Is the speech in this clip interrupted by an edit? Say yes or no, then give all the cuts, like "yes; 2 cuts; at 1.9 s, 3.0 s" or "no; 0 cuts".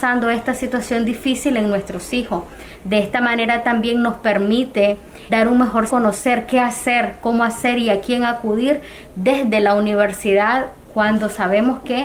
yes; 2 cuts; at 5.3 s, 5.9 s